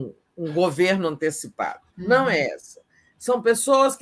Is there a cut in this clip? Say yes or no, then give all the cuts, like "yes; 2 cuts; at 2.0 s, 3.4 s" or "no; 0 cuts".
yes; 1 cut; at 1.9 s